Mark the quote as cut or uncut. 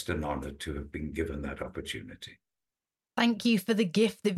uncut